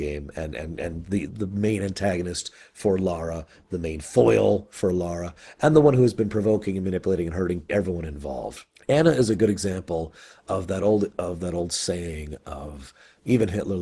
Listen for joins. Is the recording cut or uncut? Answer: cut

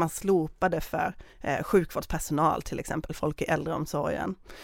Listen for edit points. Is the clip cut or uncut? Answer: cut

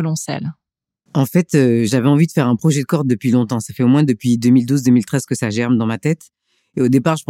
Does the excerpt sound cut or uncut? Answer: uncut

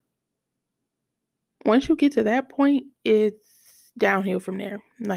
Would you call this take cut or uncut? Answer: uncut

